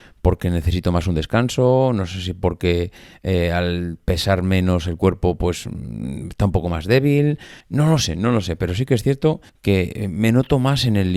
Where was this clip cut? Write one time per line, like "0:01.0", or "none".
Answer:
0:07.6
0:09.5